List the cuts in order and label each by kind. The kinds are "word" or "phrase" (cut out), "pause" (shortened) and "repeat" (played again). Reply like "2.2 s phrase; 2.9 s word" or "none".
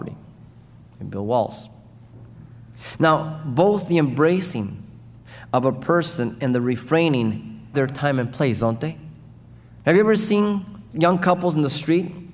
7.7 s word